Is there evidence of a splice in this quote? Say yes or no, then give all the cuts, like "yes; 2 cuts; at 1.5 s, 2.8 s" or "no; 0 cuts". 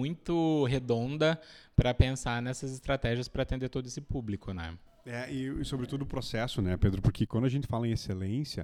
no; 0 cuts